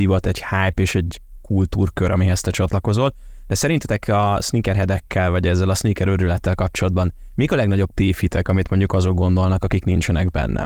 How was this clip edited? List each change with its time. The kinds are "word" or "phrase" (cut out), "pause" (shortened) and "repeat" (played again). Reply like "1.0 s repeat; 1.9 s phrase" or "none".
none